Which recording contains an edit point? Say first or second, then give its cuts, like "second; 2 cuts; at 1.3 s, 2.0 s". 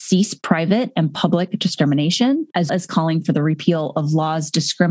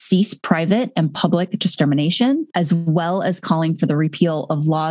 first; 1 cut; at 2.7 s